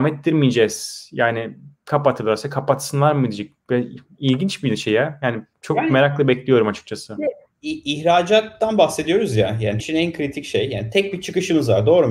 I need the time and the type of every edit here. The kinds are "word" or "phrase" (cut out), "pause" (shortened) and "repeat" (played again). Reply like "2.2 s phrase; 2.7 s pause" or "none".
9.8 s word